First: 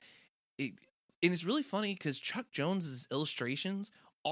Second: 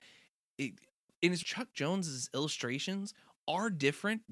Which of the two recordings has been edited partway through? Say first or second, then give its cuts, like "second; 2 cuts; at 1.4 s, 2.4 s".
second; 1 cut; at 1.4 s